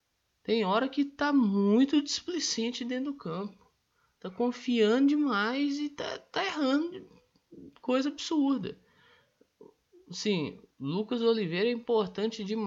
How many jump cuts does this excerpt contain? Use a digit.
1